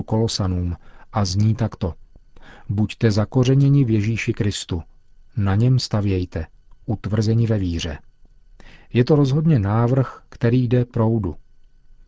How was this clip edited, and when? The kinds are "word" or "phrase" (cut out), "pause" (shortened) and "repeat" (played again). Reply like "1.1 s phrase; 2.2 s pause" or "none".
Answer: 10.9 s word